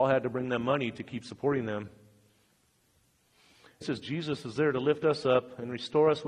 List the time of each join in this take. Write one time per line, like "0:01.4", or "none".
0:03.8